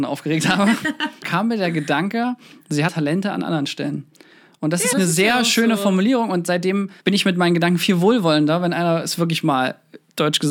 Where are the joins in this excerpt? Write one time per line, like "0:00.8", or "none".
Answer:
0:01.2
0:02.9
0:04.9
0:07.0